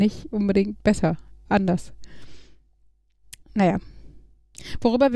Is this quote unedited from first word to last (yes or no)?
no